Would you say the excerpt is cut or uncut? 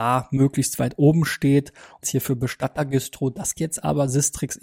cut